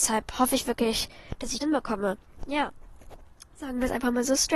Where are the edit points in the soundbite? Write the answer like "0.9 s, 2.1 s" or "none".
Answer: 1.6 s